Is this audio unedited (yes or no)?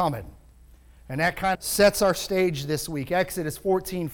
no